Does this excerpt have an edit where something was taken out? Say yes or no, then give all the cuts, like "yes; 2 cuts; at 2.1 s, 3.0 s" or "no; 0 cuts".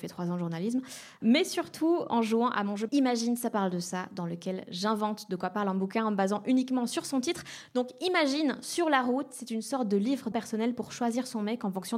yes; 2 cuts; at 2.9 s, 10.3 s